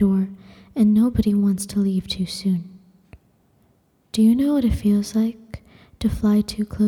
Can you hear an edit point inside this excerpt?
no; 0 cuts

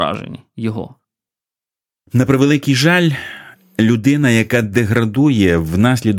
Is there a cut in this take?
no; 0 cuts

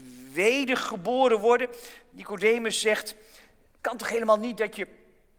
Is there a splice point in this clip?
yes; 1 cut; at 3.8 s

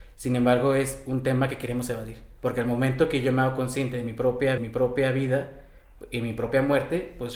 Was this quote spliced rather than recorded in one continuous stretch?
yes; 2 cuts; at 2.4 s, 4.6 s

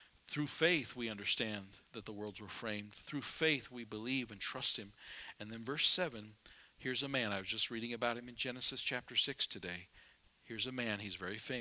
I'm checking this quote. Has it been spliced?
no; 0 cuts

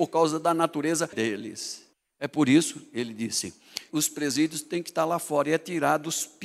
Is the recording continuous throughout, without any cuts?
no; 3 cuts; at 1.1 s, 1.9 s, 3.9 s

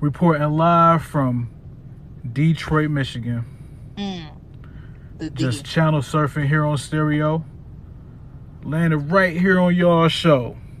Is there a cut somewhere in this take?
no; 0 cuts

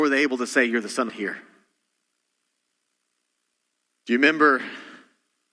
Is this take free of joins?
no; 1 cut; at 1.1 s

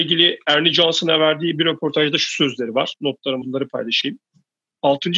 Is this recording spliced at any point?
yes; 1 cut; at 3.4 s

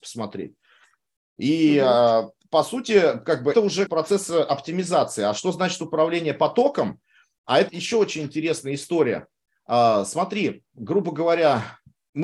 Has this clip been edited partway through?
yes; 3 cuts; at 3.5 s, 3.9 s, 7.7 s

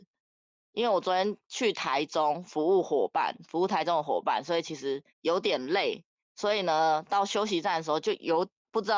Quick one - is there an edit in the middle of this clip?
yes; 2 cuts; at 5.1 s, 6.2 s

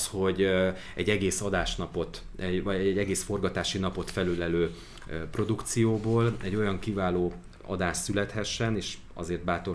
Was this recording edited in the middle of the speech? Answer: no; 0 cuts

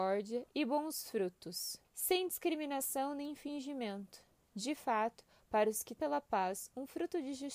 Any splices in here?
yes; 2 cuts; at 1.8 s, 6.0 s

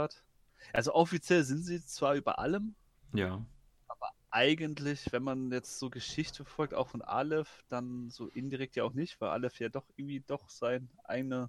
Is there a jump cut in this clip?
no; 0 cuts

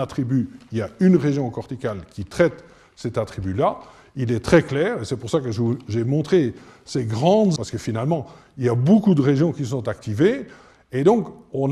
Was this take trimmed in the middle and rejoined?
yes; 1 cut; at 7.6 s

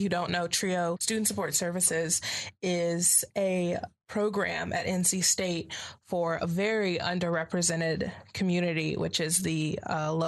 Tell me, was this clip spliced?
no; 0 cuts

